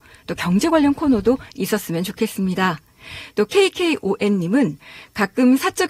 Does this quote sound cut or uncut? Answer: uncut